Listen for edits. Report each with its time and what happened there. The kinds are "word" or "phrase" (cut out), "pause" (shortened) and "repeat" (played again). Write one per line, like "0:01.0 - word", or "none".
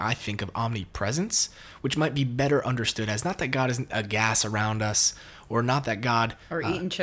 none